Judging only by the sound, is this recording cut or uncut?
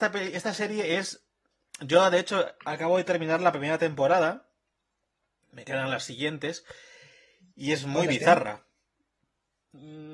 uncut